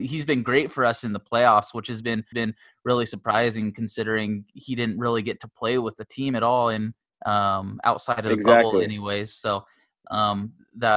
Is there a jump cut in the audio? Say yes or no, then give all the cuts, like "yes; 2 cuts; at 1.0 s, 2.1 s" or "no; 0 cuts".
yes; 2 cuts; at 2.3 s, 7.0 s